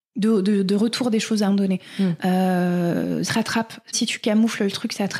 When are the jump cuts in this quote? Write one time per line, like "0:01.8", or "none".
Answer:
0:01.5
0:03.2
0:03.9